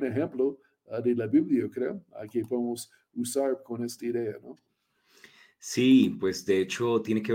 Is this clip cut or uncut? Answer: uncut